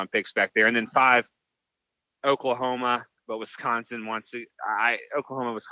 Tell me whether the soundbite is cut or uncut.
uncut